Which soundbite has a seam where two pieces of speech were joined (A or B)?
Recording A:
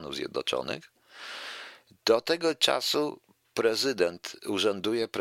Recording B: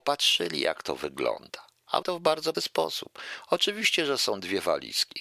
B